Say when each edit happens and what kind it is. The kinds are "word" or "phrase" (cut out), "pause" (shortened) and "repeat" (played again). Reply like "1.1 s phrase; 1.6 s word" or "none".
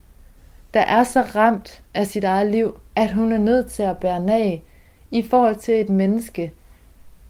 2.9 s pause